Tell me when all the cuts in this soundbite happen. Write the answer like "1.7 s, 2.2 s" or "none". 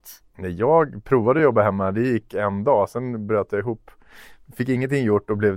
none